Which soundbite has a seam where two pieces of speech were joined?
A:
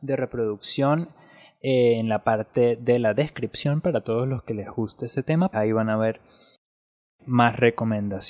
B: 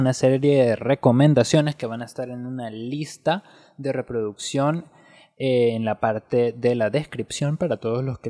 A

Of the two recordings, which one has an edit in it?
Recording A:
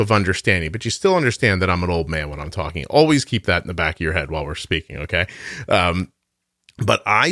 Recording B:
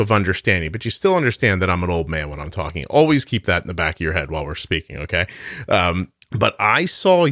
B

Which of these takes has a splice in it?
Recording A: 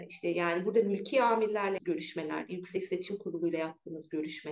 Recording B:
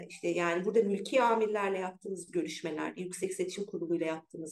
A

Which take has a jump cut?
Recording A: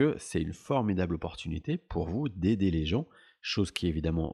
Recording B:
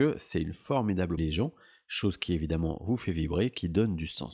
B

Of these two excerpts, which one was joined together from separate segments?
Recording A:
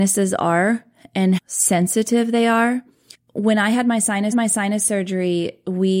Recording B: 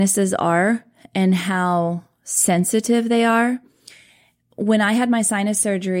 A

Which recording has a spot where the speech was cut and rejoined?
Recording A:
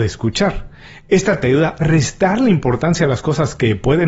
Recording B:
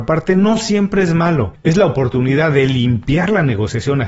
A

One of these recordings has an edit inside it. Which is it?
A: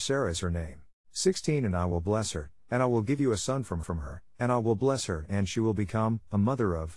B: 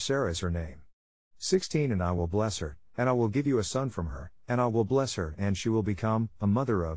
A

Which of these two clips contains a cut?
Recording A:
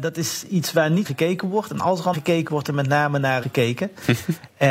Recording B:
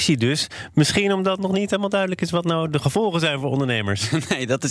A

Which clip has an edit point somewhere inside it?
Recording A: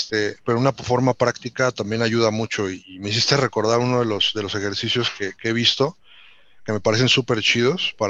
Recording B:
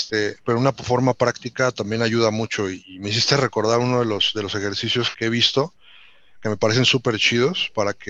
B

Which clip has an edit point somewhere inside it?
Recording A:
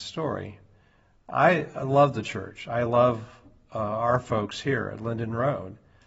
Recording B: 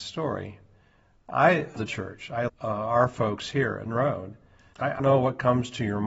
B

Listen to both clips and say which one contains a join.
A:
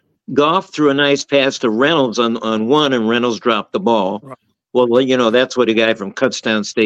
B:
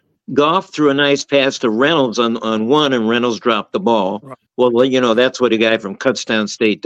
B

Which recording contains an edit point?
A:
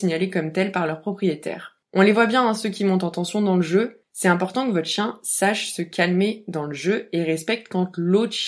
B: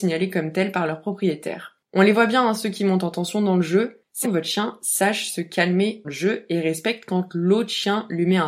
B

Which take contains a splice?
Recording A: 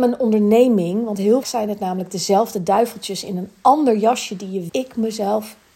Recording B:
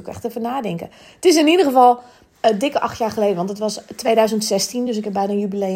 A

